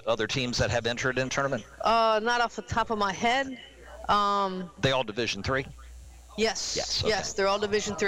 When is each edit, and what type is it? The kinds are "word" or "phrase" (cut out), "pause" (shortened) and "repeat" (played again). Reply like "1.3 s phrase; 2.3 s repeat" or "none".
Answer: 1.3 s word